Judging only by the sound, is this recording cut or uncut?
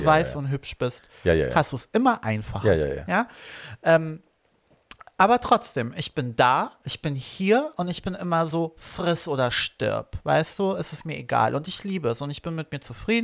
uncut